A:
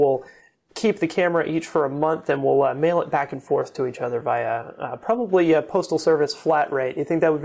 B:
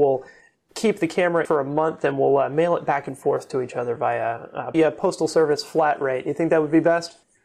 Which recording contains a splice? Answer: B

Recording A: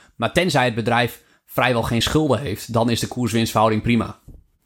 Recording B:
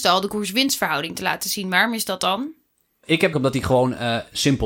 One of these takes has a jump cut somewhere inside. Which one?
B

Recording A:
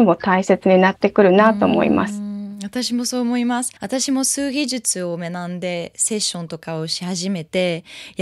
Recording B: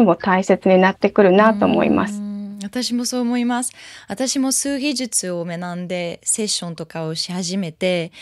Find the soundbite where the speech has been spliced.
A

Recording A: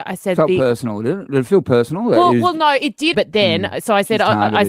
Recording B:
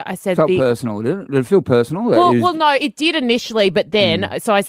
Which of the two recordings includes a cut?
A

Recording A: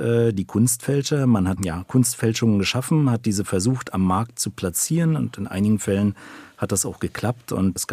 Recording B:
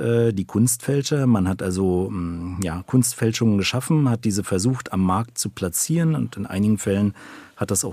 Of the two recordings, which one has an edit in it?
A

